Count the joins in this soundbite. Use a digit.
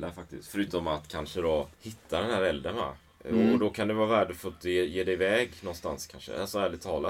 1